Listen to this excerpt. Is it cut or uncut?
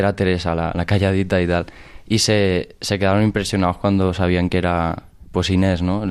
uncut